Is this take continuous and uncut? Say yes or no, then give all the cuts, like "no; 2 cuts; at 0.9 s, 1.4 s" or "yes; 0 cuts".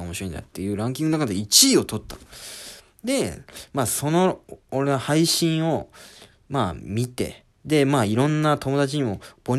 no; 1 cut; at 7.5 s